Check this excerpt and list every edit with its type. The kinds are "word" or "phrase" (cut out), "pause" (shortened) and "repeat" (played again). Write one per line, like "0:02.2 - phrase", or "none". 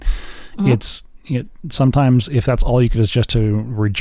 0:02.9 - word